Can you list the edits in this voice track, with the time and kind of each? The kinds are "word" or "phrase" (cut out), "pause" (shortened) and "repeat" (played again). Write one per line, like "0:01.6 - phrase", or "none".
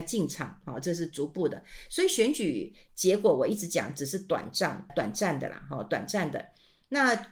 0:04.9 - word